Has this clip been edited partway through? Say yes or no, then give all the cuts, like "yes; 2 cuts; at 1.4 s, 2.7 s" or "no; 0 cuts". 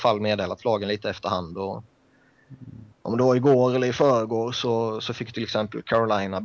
yes; 1 cut; at 2.9 s